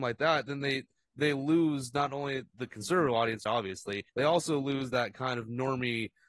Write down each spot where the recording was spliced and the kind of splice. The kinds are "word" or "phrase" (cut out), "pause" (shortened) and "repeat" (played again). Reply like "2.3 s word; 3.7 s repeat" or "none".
3.5 s word; 4.1 s pause